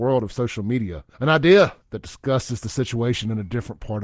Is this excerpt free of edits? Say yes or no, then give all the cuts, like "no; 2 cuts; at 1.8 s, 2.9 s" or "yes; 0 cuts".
no; 2 cuts; at 1.1 s, 1.8 s